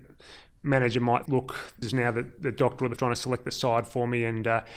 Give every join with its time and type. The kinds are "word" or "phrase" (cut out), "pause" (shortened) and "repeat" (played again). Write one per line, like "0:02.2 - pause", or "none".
0:01.3 - word
0:01.8 - word
0:03.0 - word